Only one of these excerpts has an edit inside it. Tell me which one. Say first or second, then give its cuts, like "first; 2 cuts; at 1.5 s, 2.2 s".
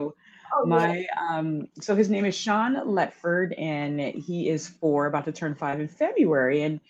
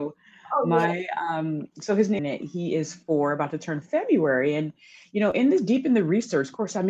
second; 2 cuts; at 2.2 s, 3.8 s